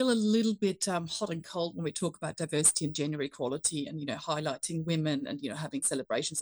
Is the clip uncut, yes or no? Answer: yes